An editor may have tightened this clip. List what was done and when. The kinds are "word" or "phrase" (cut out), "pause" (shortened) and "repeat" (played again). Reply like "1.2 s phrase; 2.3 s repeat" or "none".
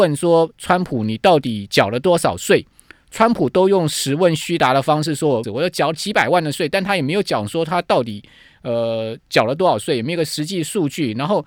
5.4 s phrase